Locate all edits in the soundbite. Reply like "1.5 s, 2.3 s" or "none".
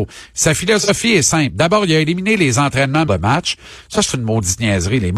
3.1 s